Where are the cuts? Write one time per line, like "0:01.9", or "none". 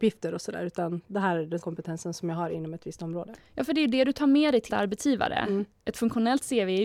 0:01.6
0:04.7

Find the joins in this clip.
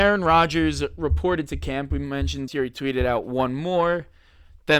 0:02.5

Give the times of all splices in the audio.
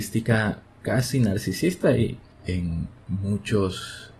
0:02.3

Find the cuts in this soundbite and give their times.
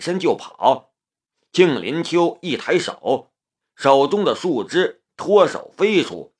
none

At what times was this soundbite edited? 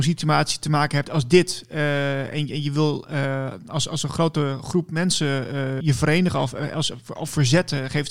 0:01.0
0:05.8

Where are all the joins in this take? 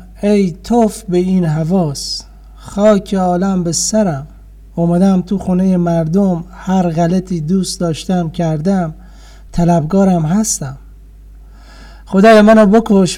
none

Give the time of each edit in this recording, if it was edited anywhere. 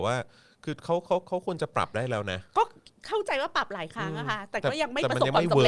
0:02.5

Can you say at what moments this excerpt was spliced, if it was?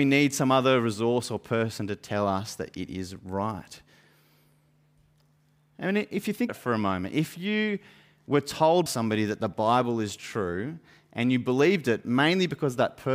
0:06.5
0:08.9

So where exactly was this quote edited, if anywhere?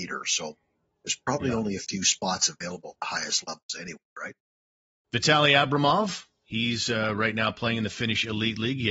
none

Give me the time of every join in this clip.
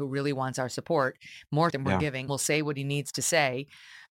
0:01.7
0:02.3

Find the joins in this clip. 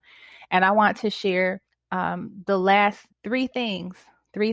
0:01.7
0:03.1

